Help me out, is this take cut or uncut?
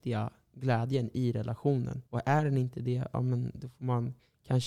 cut